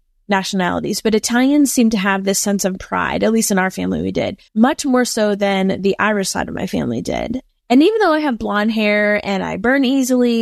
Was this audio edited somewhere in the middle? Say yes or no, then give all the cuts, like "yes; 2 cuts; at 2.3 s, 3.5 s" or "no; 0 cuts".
yes; 1 cut; at 4.5 s